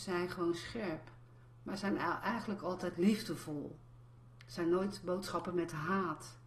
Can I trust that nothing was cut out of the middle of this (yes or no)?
yes